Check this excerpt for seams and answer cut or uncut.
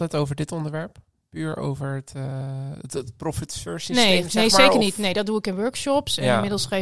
uncut